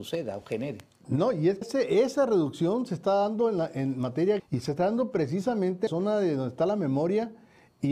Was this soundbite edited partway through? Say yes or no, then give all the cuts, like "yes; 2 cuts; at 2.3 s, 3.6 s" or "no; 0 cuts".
yes; 3 cuts; at 1.6 s, 4.4 s, 5.9 s